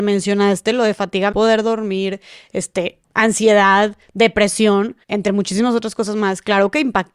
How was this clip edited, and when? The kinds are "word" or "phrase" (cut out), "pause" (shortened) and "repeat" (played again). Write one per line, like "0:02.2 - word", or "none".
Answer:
0:01.3 - phrase
0:03.0 - pause
0:05.0 - pause